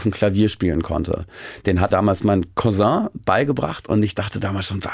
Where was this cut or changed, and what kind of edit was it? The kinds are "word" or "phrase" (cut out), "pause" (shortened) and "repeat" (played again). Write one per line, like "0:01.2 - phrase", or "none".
0:01.9 - word